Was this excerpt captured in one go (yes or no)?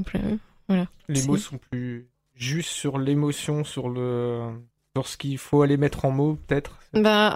yes